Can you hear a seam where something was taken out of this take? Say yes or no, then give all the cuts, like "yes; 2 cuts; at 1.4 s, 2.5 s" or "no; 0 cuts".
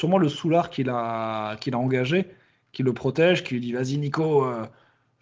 no; 0 cuts